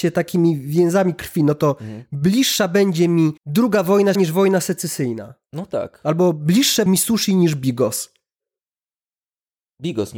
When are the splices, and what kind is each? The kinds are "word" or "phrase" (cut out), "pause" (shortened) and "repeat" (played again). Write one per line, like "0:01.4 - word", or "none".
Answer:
0:03.4 - pause
0:04.1 - word
0:06.9 - word